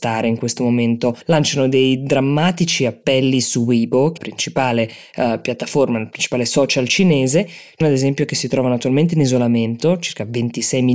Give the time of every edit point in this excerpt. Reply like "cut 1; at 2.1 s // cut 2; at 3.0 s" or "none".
cut 1; at 1.2 s // cut 2; at 4.2 s // cut 3; at 7.8 s